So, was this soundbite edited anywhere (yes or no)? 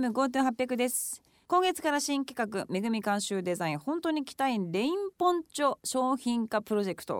no